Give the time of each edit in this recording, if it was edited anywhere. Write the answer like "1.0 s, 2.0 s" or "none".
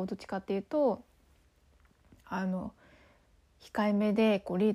none